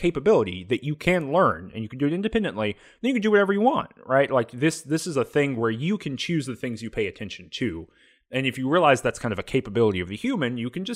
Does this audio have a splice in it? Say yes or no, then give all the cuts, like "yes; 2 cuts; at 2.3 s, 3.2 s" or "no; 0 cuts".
no; 0 cuts